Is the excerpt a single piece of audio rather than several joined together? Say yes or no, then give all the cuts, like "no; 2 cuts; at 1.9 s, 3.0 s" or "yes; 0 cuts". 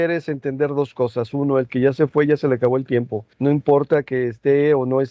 no; 1 cut; at 3.3 s